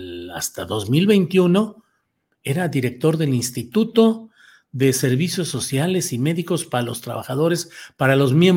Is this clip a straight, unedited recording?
yes; 0 cuts

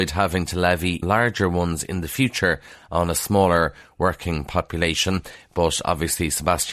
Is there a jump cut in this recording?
yes; 1 cut; at 1.0 s

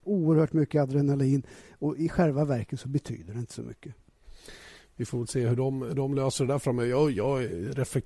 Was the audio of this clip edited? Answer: no; 0 cuts

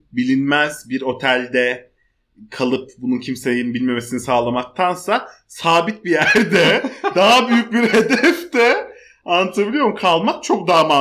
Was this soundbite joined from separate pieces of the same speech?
no; 0 cuts

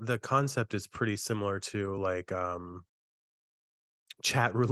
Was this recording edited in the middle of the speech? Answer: no; 0 cuts

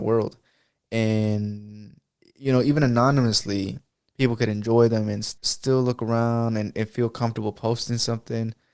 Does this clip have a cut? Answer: no; 0 cuts

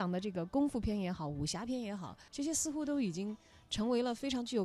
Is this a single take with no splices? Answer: no; 1 cut; at 2.3 s

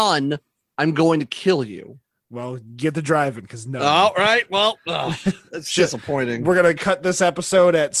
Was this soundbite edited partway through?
no; 0 cuts

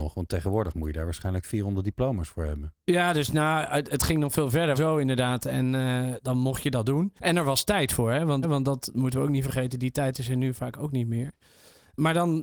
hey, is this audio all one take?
no; 4 cuts; at 4.7 s, 6.2 s, 7.2 s, 8.4 s

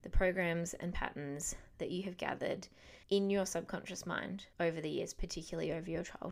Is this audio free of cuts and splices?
no; 2 cuts; at 3.0 s, 4.5 s

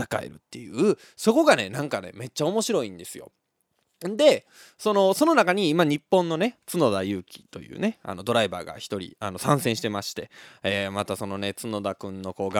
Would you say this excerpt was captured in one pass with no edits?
yes; 0 cuts

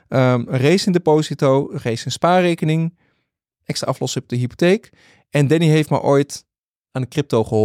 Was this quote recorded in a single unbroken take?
yes; 0 cuts

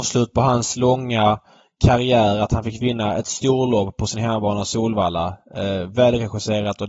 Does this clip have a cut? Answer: no; 0 cuts

